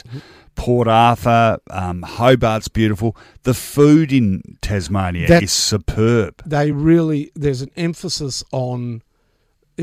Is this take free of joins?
yes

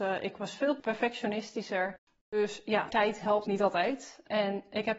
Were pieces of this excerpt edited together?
yes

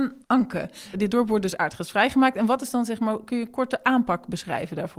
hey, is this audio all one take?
yes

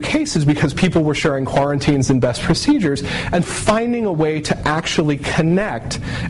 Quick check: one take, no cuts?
no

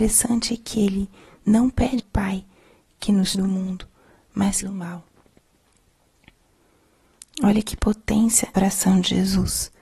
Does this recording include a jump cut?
yes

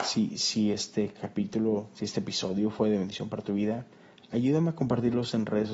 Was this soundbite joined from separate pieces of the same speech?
no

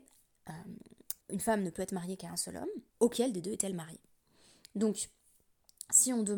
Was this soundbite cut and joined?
yes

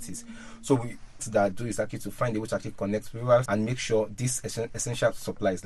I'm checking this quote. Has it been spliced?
yes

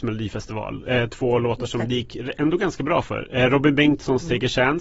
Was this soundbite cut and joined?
no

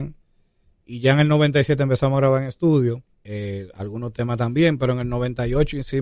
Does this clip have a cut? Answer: yes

